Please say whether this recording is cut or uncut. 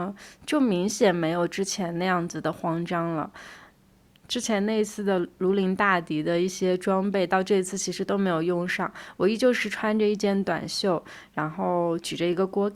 uncut